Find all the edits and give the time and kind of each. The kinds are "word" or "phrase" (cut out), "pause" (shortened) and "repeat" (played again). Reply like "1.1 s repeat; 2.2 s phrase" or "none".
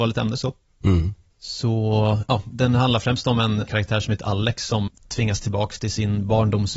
3.7 s word; 4.9 s word